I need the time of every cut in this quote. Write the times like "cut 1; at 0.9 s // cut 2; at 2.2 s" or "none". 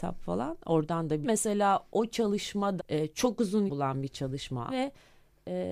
cut 1; at 1.2 s // cut 2; at 1.9 s // cut 3; at 2.8 s // cut 4; at 3.7 s // cut 5; at 4.7 s